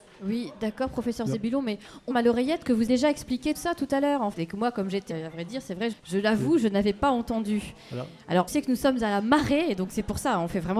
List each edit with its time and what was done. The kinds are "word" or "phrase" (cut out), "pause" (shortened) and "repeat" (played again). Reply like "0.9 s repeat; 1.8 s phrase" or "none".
2.1 s word; 2.9 s word; 3.5 s word; 4.3 s word; 5.1 s word; 5.9 s word; 8.5 s word